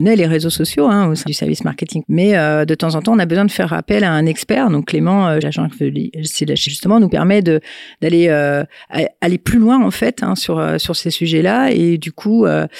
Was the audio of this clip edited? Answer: yes; 4 cuts; at 1.3 s, 2.0 s, 5.4 s, 6.7 s

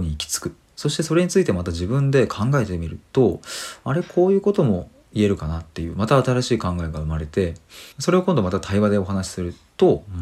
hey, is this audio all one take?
no; 1 cut; at 7.9 s

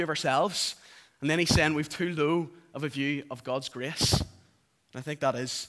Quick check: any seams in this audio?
no; 0 cuts

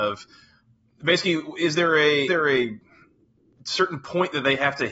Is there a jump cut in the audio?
yes; 1 cut; at 2.3 s

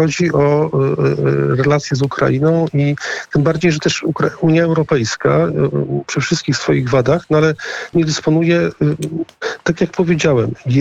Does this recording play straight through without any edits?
no; 2 cuts; at 7.9 s, 9.6 s

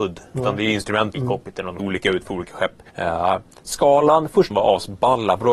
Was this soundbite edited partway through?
yes; 4 cuts; at 1.1 s, 1.8 s, 2.9 s, 4.5 s

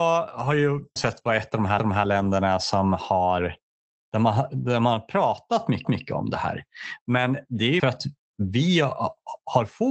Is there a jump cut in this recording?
yes; 4 cuts; at 1.0 s, 1.8 s, 5.8 s, 7.8 s

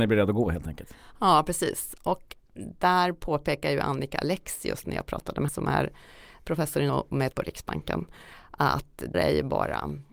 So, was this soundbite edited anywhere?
yes; 5 cuts; at 2.4 s, 5.5 s, 6.9 s, 7.3 s, 9.1 s

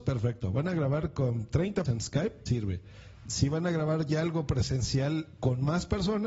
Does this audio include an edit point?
yes; 2 cuts; at 1.8 s, 2.5 s

